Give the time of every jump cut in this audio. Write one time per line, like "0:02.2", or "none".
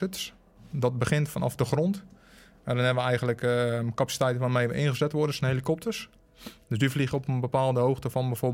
none